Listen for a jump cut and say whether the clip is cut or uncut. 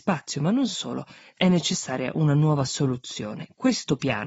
uncut